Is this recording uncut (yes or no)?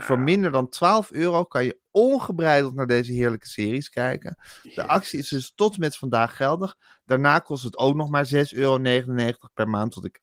yes